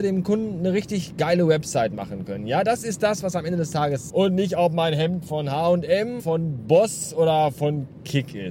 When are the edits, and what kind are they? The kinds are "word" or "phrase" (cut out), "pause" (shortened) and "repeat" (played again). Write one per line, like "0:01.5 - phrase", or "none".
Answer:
0:04.1 - word
0:06.2 - word